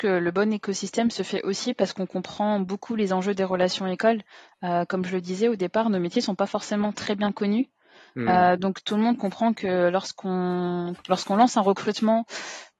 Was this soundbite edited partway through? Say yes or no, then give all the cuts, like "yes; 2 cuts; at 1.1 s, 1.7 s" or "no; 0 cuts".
no; 0 cuts